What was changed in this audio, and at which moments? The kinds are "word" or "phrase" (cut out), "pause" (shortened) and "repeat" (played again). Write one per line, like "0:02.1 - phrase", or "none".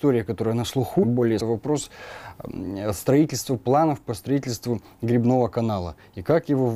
0:01.0 - phrase
0:01.4 - phrase